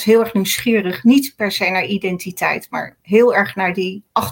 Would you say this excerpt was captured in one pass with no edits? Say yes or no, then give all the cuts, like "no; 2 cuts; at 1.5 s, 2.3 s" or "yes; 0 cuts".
yes; 0 cuts